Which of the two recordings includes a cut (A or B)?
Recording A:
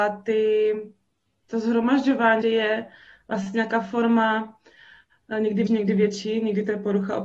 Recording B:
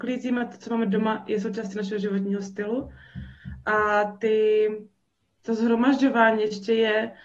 A